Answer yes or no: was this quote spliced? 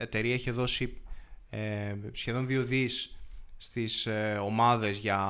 no